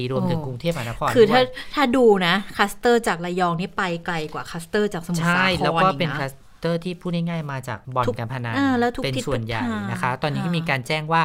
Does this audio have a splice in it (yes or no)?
yes